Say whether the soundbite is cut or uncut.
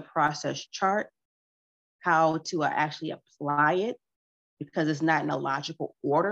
uncut